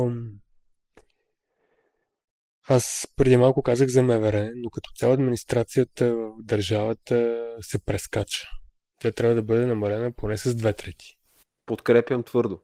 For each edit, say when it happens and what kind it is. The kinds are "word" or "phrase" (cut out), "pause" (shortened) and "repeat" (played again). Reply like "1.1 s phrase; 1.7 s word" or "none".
none